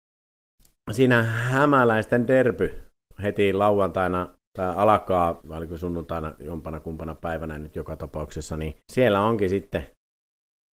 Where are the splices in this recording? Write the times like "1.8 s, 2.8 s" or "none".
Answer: 4.5 s, 5.4 s, 8.8 s